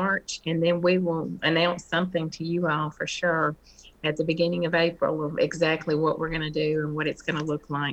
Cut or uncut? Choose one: uncut